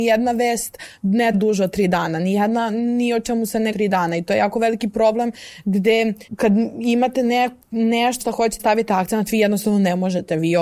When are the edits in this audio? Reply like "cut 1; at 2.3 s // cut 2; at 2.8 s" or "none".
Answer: cut 1; at 1.3 s // cut 2; at 3.7 s // cut 3; at 6.3 s // cut 4; at 8.2 s // cut 5; at 8.6 s